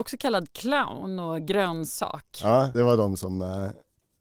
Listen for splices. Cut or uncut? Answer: cut